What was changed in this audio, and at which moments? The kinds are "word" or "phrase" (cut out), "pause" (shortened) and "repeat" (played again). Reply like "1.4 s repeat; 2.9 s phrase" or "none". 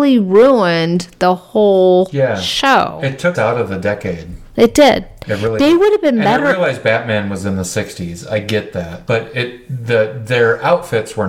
3.3 s word